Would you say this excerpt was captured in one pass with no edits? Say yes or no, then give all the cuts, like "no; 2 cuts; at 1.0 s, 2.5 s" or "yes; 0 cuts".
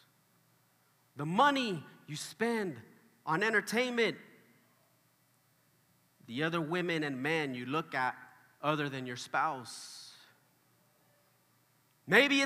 yes; 0 cuts